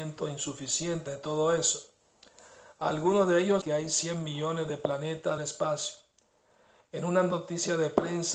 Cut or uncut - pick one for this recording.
cut